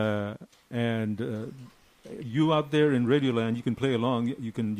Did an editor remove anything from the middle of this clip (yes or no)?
no